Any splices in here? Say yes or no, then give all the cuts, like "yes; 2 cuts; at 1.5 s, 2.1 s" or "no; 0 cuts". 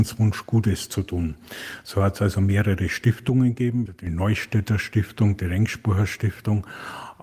yes; 1 cut; at 3.9 s